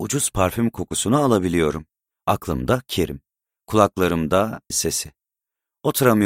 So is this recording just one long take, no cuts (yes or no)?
no